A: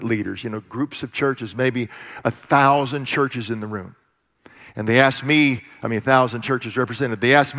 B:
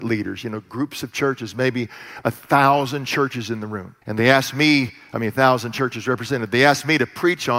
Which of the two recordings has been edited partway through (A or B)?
B